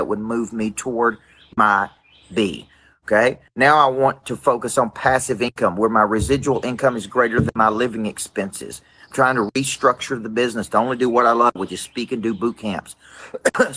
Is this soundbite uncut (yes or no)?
yes